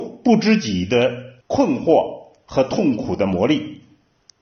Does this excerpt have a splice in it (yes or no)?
yes